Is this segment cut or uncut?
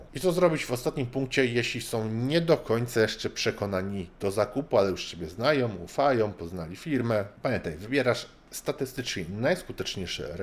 uncut